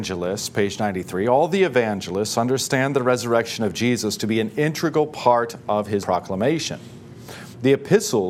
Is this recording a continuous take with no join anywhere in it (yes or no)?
no